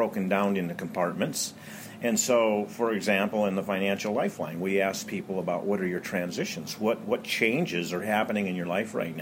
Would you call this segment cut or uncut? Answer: uncut